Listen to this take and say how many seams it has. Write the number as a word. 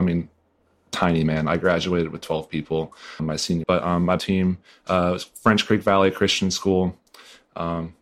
three